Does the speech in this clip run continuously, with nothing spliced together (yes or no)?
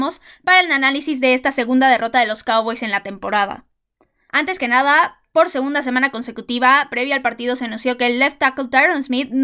yes